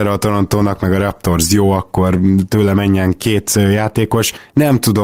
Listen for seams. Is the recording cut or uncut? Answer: uncut